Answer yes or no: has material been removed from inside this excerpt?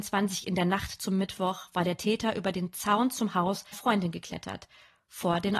yes